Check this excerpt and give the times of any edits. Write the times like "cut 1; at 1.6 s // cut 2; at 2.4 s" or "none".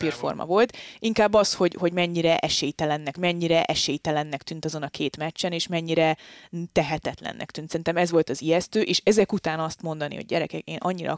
cut 1; at 3.2 s